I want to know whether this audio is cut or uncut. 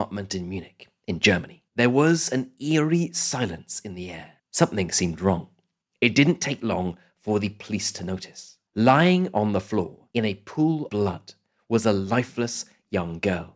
cut